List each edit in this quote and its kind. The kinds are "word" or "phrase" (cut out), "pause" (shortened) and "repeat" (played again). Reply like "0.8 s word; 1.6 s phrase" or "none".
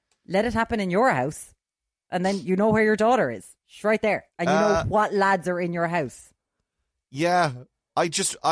4.3 s pause